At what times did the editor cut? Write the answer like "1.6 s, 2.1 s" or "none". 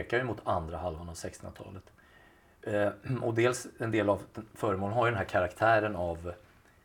none